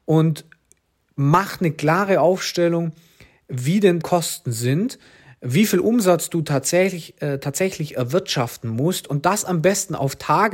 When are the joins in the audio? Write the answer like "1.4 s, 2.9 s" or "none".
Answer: 4.0 s